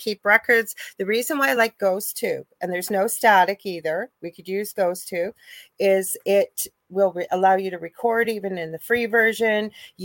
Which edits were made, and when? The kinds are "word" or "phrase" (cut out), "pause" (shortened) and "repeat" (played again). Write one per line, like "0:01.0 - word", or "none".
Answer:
none